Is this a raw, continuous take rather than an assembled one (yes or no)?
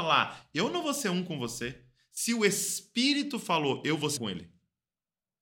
no